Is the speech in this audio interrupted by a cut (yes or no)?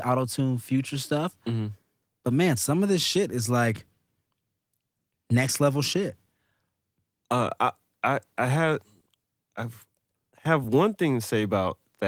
no